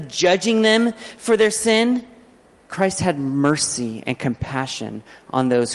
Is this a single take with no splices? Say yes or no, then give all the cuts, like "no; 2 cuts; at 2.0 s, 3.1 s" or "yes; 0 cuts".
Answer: yes; 0 cuts